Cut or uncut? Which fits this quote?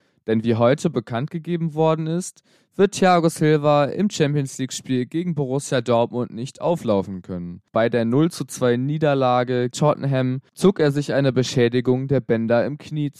cut